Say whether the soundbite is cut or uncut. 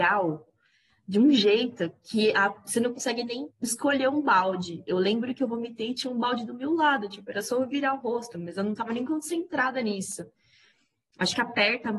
cut